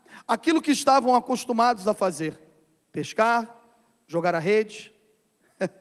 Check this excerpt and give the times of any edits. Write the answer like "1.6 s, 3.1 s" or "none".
none